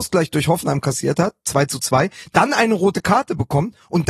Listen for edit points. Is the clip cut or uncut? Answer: uncut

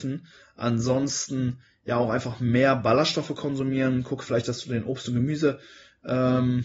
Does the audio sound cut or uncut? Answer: uncut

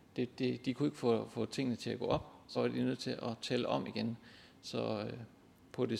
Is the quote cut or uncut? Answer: cut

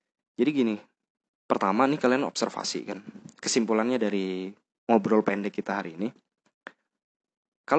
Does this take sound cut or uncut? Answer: cut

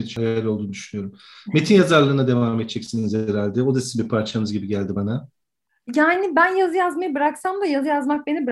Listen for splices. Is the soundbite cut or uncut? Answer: uncut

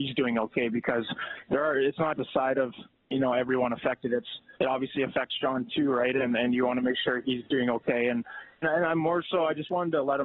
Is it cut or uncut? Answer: cut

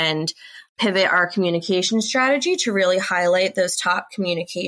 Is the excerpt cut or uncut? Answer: uncut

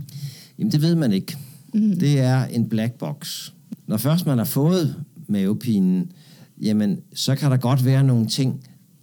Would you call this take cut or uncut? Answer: cut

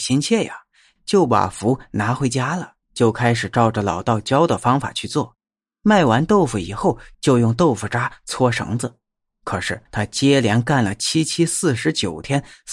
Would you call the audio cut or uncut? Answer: cut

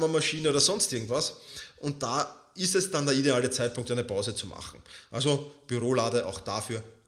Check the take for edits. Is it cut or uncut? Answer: uncut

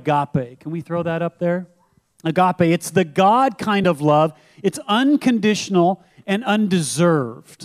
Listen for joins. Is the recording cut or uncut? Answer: uncut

